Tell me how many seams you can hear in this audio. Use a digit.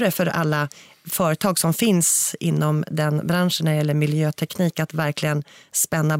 0